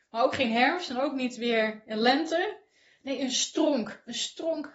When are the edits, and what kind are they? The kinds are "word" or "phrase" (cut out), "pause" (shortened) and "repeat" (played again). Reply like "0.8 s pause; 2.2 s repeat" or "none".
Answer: none